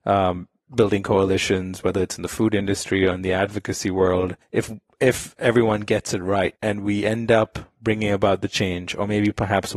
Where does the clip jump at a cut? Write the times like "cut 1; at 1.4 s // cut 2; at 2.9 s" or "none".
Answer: cut 1; at 4.4 s // cut 2; at 6.6 s